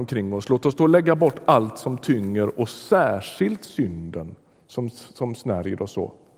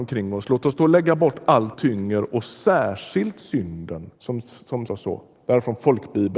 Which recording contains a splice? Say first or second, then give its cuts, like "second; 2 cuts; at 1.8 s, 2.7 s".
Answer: second; 3 cuts; at 1.7 s, 4.2 s, 4.9 s